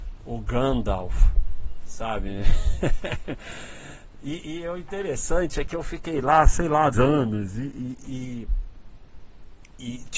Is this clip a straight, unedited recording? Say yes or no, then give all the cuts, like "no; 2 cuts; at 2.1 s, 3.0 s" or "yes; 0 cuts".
no; 2 cuts; at 6.9 s, 8.0 s